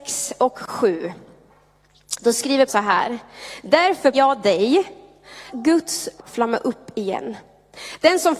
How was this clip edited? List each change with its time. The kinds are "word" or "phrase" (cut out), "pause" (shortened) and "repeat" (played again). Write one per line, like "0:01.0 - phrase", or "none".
0:02.7 - word
0:04.1 - word
0:05.5 - word
0:06.2 - word